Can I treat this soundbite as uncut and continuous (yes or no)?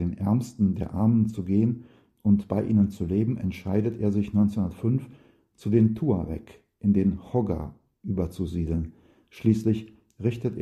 yes